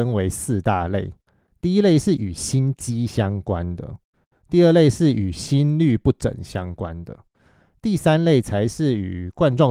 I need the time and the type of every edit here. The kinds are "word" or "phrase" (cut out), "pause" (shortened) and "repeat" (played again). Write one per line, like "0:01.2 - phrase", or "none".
none